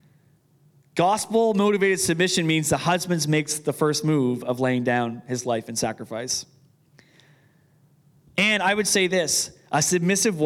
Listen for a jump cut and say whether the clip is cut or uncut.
uncut